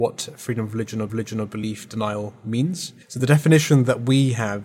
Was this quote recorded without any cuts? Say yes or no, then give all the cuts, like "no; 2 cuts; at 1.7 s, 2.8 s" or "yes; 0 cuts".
no; 2 cuts; at 1.1 s, 3.0 s